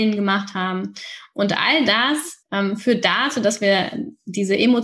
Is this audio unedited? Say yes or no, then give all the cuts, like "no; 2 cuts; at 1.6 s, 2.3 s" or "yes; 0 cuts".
no; 1 cut; at 2.4 s